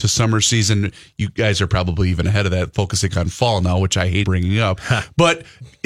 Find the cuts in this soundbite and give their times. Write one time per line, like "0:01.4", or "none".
0:04.2